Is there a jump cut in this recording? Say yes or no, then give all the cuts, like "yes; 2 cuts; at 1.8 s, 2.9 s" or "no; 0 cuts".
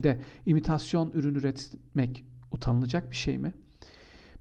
no; 0 cuts